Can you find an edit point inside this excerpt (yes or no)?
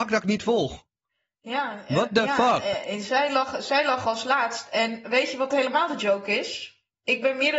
no